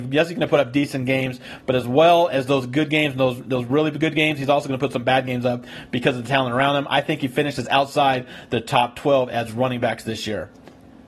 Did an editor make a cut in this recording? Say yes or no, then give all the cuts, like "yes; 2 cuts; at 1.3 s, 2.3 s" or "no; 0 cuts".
no; 0 cuts